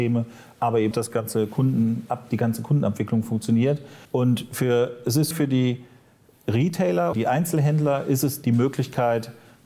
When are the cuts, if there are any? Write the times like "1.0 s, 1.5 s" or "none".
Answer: 0.9 s, 4.1 s, 5.3 s, 7.1 s, 8.4 s